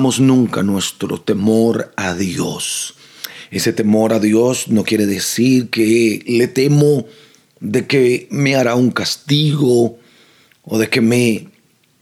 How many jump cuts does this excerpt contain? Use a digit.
0